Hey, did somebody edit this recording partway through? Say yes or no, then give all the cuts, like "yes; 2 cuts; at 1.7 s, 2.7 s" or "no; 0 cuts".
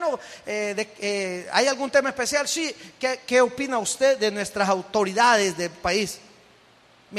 no; 0 cuts